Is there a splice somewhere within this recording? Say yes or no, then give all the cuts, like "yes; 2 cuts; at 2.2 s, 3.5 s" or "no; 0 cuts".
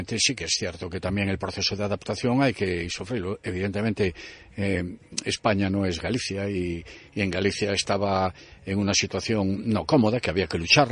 no; 0 cuts